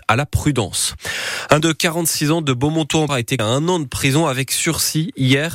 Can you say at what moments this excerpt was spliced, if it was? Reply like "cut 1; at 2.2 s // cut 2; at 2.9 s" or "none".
cut 1; at 1.6 s // cut 2; at 3.1 s // cut 3; at 3.4 s